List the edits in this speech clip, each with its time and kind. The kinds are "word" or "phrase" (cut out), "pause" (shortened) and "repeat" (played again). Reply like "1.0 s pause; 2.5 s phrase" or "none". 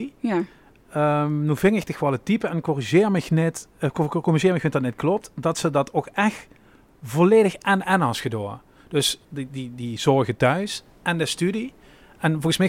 9.2 s pause